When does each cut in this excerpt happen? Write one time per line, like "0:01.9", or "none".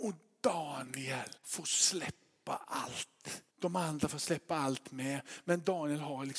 0:01.4
0:03.5

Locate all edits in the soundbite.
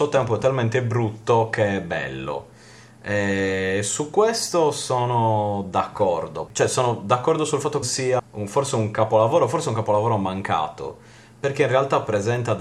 0:06.5
0:07.8
0:08.2

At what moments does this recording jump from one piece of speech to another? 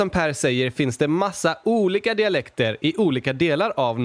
none

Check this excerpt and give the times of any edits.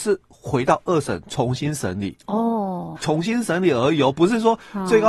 0:03.0

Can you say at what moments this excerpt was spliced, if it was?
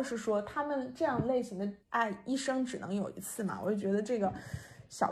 0:01.8

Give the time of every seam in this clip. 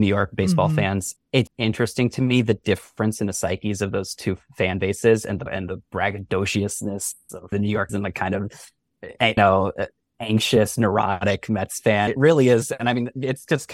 0:01.2
0:01.5
0:05.5
0:07.5
0:07.9
0:09.4
0:12.1

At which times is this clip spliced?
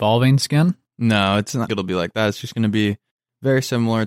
0:01.7

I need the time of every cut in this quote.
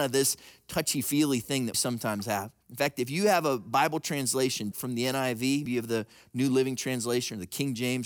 0:01.7
0:02.6
0:04.7
0:05.7

